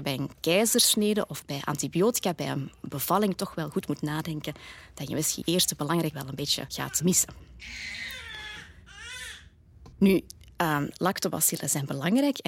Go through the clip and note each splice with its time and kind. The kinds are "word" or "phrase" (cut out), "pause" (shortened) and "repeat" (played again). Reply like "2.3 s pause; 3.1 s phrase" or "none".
5.4 s word; 6.1 s word; 9.9 s pause